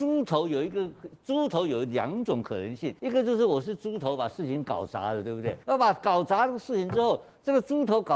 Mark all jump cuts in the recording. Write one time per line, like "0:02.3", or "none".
0:03.0
0:05.6